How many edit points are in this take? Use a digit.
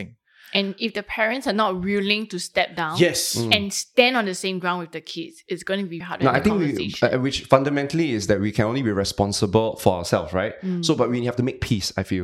1